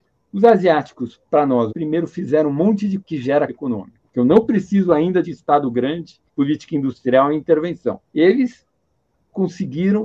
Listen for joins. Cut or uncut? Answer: cut